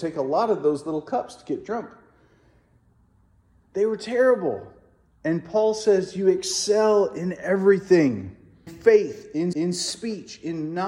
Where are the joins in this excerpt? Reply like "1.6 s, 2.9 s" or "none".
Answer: 8.7 s, 9.5 s